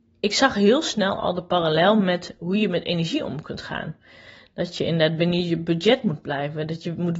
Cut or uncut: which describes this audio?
uncut